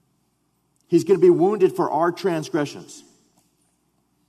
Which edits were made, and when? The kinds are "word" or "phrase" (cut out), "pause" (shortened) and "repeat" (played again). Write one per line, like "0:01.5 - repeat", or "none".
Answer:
none